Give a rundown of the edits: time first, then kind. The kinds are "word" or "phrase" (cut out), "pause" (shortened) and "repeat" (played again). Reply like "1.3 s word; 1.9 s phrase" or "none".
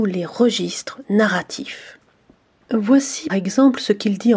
3.3 s word